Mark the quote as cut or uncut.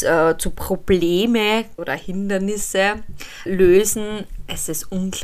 cut